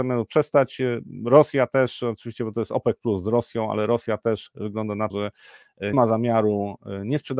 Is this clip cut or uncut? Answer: cut